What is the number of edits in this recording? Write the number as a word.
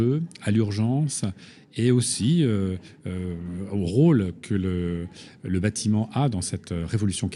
zero